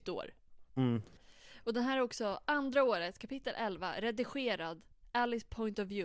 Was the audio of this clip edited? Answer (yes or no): no